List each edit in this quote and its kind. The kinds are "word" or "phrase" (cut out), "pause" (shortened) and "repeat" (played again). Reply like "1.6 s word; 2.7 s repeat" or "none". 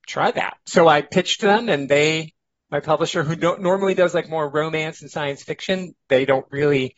none